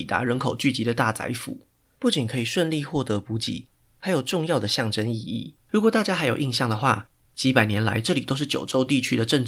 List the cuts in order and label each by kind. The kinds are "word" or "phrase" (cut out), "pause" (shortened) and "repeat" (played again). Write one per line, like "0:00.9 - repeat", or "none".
0:05.6 - pause